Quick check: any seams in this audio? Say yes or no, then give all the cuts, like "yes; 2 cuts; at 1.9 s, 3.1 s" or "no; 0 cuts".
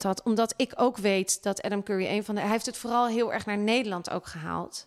no; 0 cuts